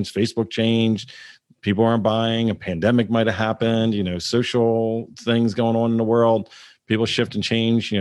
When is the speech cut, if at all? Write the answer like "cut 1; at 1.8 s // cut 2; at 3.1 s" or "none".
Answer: none